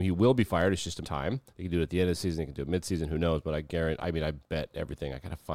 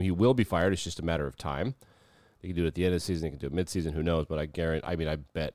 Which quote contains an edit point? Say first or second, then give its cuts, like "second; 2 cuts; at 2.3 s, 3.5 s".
first; 2 cuts; at 1.0 s, 1.5 s